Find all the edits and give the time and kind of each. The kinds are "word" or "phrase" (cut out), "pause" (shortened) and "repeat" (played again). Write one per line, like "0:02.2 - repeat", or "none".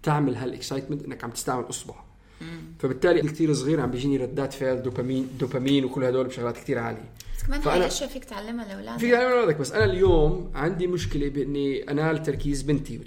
0:03.2 - phrase